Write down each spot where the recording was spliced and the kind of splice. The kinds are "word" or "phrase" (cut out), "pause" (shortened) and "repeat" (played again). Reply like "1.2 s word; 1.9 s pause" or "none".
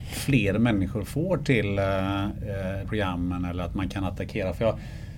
2.8 s phrase